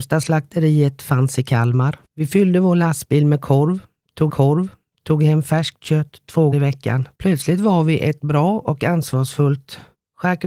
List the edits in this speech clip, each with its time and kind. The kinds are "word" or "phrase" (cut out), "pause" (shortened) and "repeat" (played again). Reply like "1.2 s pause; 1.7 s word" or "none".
2.0 s pause; 4.3 s repeat; 6.5 s word; 7.1 s pause